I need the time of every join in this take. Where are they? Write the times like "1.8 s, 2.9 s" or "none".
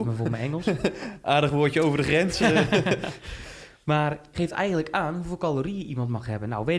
4.3 s